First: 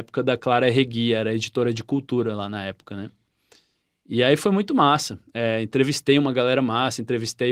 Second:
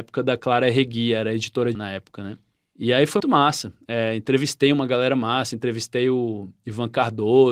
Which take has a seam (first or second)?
second